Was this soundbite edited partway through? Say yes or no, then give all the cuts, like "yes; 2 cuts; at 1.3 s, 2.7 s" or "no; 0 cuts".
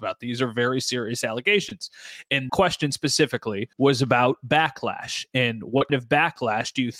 yes; 3 cuts; at 2.5 s, 3.7 s, 5.9 s